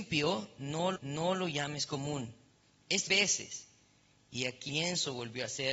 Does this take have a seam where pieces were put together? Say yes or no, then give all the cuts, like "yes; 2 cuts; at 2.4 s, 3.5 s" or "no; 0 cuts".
yes; 3 cuts; at 1.0 s, 3.1 s, 4.7 s